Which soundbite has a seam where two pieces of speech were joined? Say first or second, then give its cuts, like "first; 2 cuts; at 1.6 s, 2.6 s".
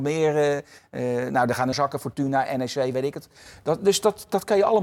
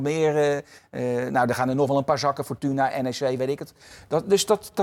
first; 1 cut; at 1.7 s